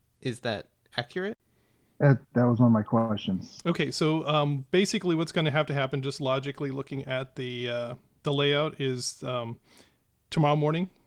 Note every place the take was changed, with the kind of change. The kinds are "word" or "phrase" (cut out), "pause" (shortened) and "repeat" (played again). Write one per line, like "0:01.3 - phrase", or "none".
none